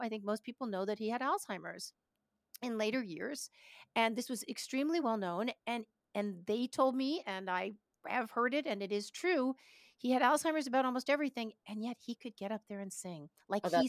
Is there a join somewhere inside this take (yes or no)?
no